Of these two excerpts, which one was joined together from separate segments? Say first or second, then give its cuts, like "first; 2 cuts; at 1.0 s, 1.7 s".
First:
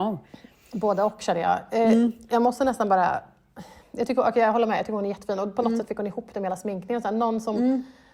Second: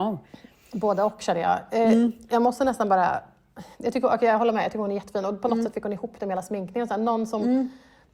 second; 1 cut; at 3.7 s